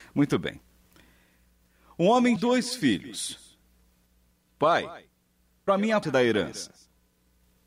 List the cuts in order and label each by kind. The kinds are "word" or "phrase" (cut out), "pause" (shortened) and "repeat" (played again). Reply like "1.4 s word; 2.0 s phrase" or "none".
2.4 s word; 5.7 s word; 6.0 s word